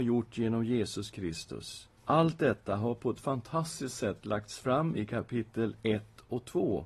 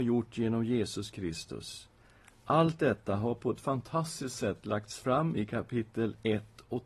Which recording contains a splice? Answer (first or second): first